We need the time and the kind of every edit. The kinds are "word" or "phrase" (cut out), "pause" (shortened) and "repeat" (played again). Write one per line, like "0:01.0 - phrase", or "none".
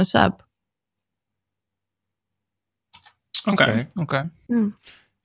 none